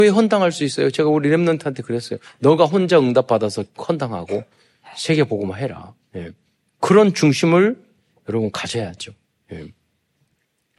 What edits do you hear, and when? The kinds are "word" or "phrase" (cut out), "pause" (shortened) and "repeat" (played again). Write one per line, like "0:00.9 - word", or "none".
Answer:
none